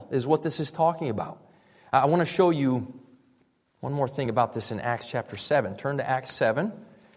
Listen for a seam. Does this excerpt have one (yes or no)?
no